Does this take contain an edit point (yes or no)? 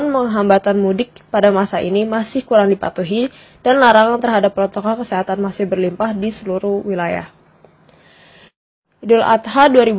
no